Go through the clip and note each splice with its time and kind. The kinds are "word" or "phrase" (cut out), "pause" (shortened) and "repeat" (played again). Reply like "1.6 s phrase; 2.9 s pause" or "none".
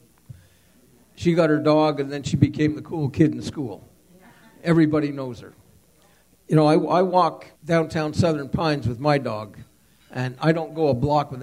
7.5 s pause